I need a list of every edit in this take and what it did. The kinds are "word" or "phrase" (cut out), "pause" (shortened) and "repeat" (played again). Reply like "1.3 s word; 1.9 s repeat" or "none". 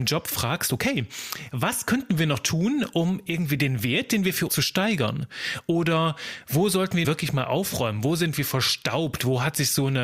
4.5 s phrase; 7.0 s phrase